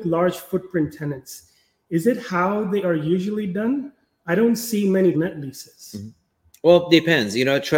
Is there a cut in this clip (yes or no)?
yes